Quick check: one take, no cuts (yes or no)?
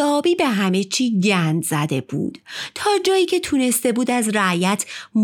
yes